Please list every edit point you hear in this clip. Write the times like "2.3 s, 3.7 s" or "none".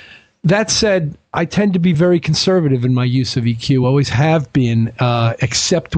none